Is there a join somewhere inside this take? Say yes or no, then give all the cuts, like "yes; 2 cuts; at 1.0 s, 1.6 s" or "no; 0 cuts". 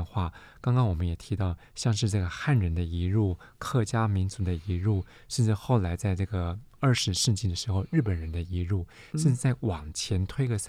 no; 0 cuts